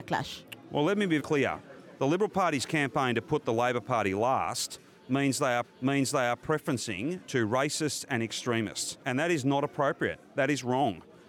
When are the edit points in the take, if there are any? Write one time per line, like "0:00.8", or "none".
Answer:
0:01.2
0:05.6
0:09.0